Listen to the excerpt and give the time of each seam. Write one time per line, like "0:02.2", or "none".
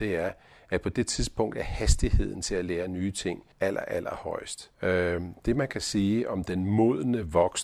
0:03.5
0:04.7